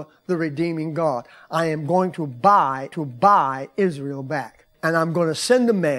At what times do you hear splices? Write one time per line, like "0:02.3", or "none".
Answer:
0:02.9
0:04.7